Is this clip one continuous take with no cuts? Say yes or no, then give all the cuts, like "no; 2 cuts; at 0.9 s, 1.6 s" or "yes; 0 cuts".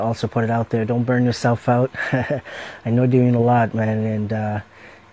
yes; 0 cuts